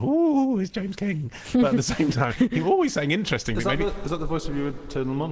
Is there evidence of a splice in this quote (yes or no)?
no